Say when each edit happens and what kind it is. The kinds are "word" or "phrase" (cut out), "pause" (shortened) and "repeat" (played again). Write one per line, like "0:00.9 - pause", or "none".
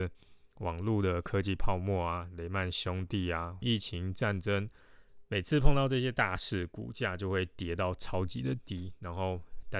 0:03.6 - phrase